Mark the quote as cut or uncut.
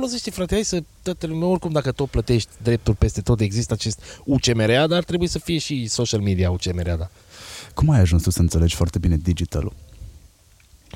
uncut